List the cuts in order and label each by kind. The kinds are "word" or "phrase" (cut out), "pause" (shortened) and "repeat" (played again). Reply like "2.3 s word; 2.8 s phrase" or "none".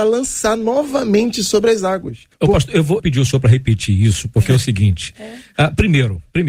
2.3 s pause; 3.0 s phrase